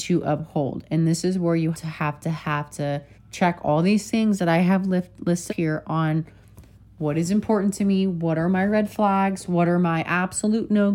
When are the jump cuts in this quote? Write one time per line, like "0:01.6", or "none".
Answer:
0:01.7
0:03.1
0:05.5